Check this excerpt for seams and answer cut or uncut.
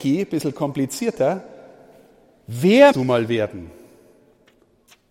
cut